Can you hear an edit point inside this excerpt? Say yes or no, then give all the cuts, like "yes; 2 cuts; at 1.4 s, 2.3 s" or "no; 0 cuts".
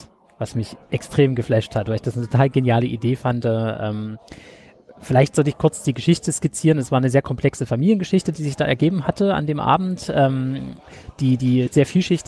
no; 0 cuts